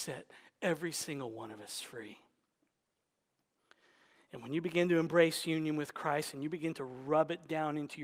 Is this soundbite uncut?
yes; 0 cuts

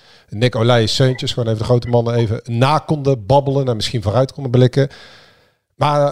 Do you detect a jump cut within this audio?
no; 0 cuts

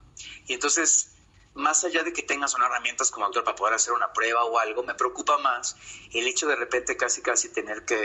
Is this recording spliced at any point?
no; 0 cuts

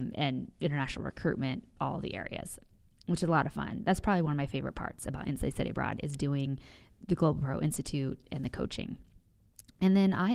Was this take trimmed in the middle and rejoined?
no; 0 cuts

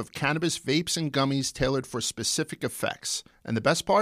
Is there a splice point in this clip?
no; 0 cuts

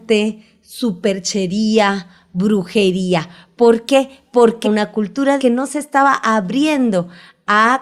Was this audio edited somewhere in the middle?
yes; 2 cuts; at 4.6 s, 5.4 s

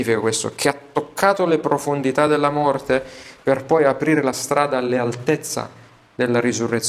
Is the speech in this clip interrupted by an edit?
no; 0 cuts

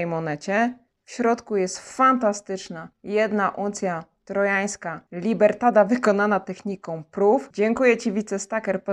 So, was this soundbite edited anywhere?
yes; 1 cut; at 2.9 s

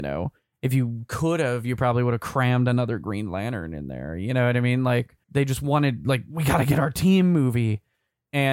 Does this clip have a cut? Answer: yes; 1 cut; at 5.2 s

